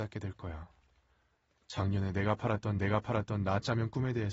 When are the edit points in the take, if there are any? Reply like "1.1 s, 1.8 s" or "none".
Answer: 2.8 s